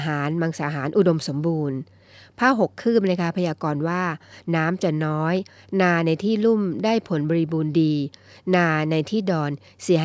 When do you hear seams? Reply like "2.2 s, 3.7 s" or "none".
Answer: none